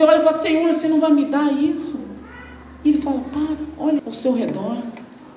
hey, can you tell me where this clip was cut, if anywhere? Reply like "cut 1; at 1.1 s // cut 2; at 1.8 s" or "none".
cut 1; at 4.0 s